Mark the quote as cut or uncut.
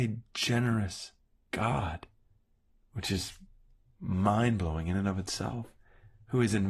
uncut